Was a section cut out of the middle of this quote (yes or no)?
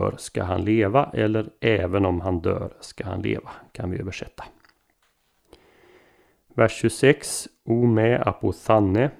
no